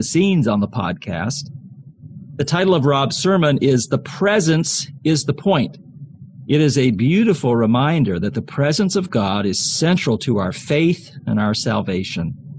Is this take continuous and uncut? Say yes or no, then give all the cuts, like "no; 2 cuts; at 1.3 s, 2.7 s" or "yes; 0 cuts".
yes; 0 cuts